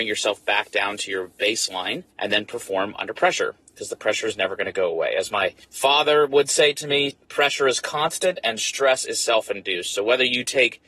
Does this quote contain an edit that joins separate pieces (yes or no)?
yes